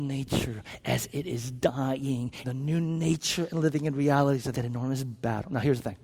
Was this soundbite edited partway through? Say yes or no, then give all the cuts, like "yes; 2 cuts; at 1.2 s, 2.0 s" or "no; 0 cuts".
yes; 2 cuts; at 2.4 s, 4.5 s